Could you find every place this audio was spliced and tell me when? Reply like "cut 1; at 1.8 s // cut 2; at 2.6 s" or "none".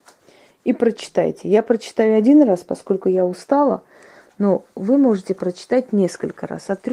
none